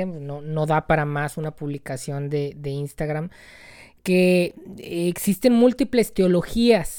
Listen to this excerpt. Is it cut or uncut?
uncut